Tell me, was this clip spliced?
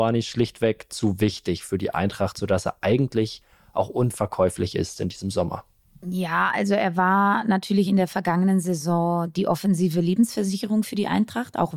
no; 0 cuts

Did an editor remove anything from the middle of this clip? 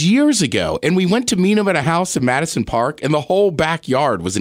no; 0 cuts

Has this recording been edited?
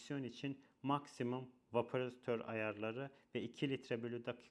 no; 0 cuts

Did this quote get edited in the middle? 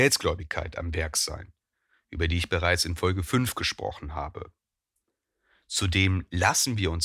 no; 0 cuts

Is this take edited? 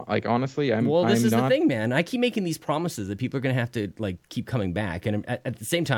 no; 0 cuts

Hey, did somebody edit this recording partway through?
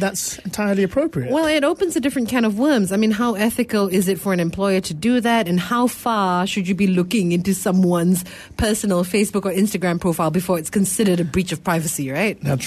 no; 0 cuts

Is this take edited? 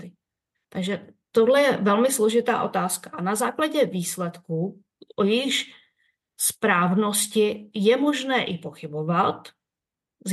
no; 0 cuts

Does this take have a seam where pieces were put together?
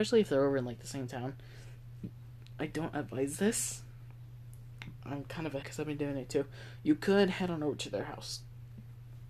yes; 2 cuts; at 5.0 s, 5.6 s

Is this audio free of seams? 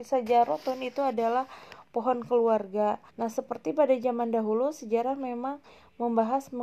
no; 1 cut; at 3.1 s

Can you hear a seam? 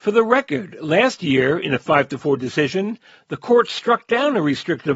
no; 0 cuts

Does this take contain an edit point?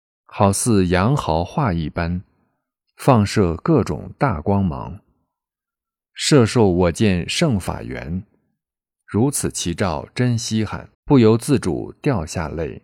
yes; 1 cut; at 10.9 s

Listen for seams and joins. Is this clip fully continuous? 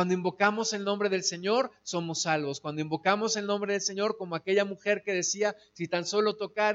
yes; 0 cuts

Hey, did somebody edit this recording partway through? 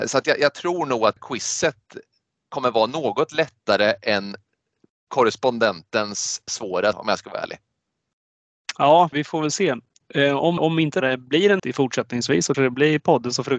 yes; 8 cuts; at 1.2 s, 6.5 s, 6.9 s, 9.1 s, 10.6 s, 11.0 s, 11.6 s, 12.5 s

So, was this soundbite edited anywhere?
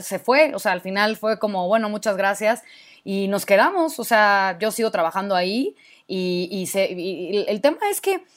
no; 0 cuts

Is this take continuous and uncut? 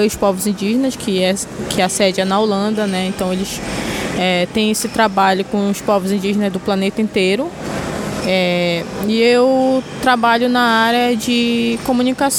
yes; 0 cuts

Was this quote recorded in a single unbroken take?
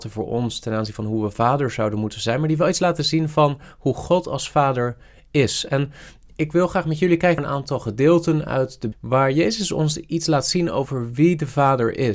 no; 2 cuts; at 7.4 s, 8.9 s

